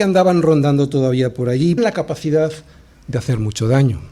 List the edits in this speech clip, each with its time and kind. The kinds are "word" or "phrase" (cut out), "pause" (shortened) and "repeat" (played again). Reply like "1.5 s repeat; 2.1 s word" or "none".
1.8 s phrase; 2.9 s pause